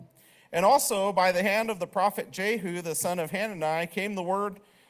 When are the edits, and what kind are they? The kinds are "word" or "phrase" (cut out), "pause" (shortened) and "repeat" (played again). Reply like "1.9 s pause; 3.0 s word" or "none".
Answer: none